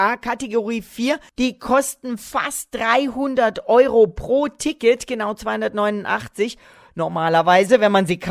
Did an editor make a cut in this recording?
no; 0 cuts

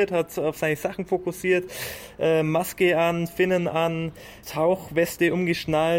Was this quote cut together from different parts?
yes; 1 cut; at 4.4 s

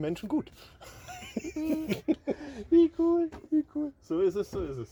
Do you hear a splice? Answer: no; 0 cuts

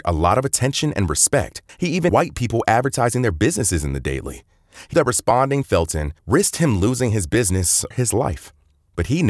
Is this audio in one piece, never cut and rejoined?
no; 6 cuts; at 1.7 s, 2.1 s, 4.9 s, 5.6 s, 6.2 s, 7.9 s

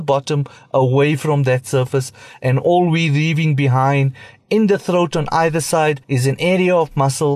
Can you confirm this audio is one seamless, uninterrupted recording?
no; 1 cut; at 6.0 s

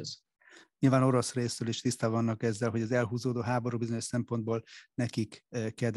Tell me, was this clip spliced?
no; 0 cuts

